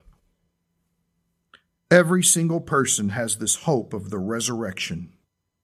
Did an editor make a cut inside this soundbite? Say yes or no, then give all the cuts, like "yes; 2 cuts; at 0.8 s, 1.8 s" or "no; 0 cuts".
no; 0 cuts